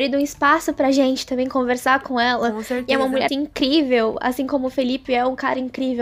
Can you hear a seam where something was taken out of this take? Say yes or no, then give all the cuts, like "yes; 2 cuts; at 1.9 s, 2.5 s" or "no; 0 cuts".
yes; 1 cut; at 3.3 s